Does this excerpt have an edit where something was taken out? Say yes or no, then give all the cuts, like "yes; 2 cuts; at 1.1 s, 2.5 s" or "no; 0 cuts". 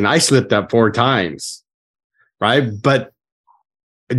no; 0 cuts